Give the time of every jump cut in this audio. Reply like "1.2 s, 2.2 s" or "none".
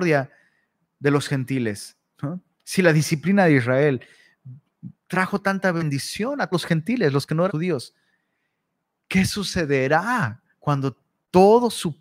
5.0 s, 6.5 s, 7.5 s, 10.5 s